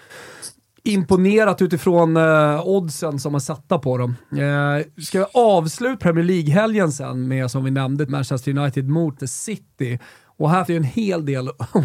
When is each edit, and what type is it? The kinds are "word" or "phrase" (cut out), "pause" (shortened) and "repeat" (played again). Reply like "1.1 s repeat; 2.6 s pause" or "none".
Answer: 6.0 s word; 7.5 s word; 8.1 s word; 9.2 s word; 10.7 s word